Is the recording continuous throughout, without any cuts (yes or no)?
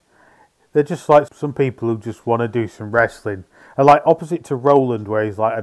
no